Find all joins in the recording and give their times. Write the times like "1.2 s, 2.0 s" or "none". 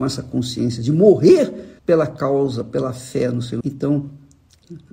1.8 s, 3.6 s